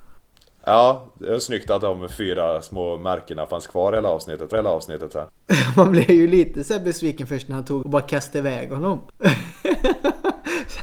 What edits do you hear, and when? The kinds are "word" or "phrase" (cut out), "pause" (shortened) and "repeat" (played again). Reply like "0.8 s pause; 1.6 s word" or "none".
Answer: 4.5 s repeat; 7.8 s word

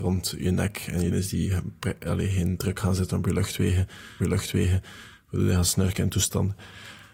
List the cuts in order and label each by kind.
1.1 s word; 4.2 s repeat

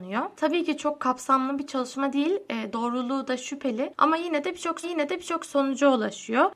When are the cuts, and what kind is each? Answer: 4.8 s repeat

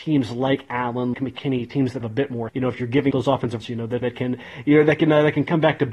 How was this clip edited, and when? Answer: 1.1 s word; 2.0 s word; 2.5 s word; 3.1 s word; 3.6 s word; 4.0 s word

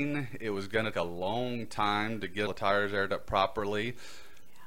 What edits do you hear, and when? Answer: 0.9 s word; 2.5 s word

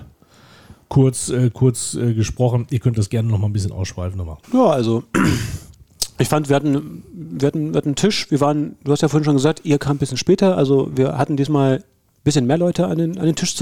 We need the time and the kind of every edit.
4.4 s pause

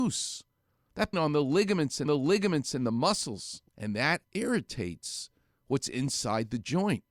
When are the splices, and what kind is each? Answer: 1.1 s phrase; 2.1 s repeat; 3.7 s pause; 4.2 s word

